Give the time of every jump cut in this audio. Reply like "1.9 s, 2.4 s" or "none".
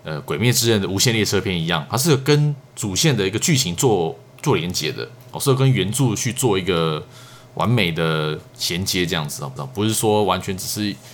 5.2 s, 9.6 s

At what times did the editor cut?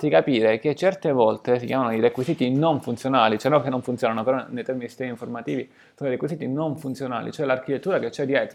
none

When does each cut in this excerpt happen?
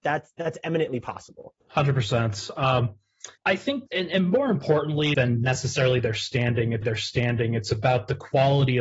1.6 s, 3.4 s, 3.9 s, 5.1 s, 6.8 s

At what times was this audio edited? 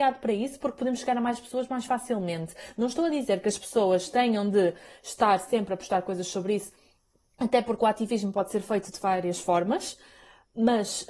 none

